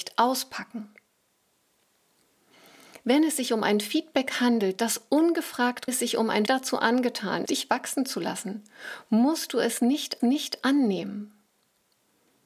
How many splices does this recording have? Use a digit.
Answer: 4